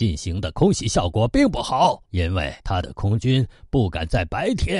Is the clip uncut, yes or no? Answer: no